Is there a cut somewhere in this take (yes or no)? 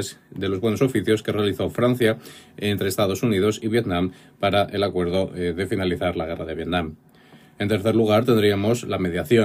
no